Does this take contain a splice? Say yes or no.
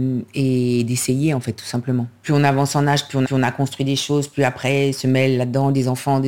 yes